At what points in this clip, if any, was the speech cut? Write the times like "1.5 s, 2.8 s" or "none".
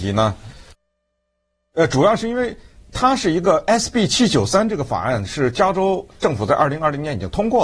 none